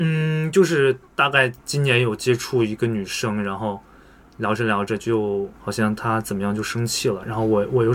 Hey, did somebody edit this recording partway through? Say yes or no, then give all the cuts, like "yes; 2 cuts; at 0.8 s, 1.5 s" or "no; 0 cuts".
yes; 1 cut; at 5.5 s